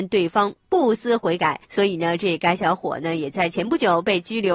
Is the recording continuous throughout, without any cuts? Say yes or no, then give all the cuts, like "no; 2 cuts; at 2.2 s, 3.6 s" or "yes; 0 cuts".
no; 1 cut; at 1.6 s